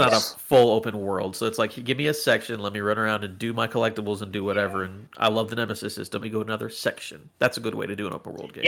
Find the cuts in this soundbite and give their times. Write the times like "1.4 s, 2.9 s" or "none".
6.2 s